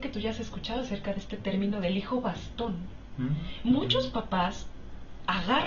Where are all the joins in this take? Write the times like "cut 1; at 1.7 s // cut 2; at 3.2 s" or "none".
none